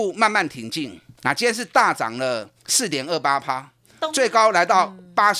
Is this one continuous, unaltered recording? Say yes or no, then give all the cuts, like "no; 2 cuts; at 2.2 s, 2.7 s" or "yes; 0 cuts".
no; 2 cuts; at 1.2 s, 2.6 s